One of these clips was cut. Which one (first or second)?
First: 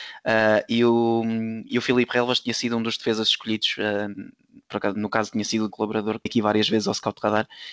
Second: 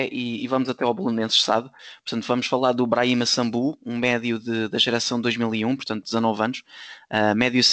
first